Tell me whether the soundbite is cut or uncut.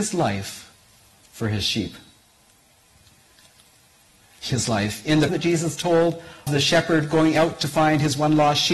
cut